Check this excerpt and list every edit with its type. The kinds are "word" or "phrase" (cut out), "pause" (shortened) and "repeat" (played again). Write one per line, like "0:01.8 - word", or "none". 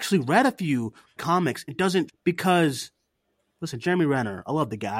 0:01.2 - word
0:01.7 - word
0:02.1 - word
0:03.8 - word